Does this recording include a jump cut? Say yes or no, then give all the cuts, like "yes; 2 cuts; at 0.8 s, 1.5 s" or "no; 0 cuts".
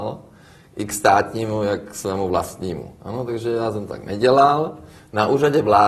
no; 0 cuts